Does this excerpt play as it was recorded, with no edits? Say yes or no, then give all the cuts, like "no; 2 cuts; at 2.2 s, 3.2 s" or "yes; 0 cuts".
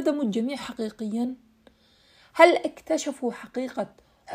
yes; 0 cuts